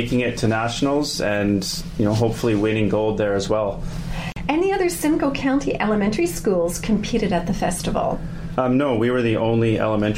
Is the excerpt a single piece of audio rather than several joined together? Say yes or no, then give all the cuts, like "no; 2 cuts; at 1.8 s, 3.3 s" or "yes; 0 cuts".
yes; 0 cuts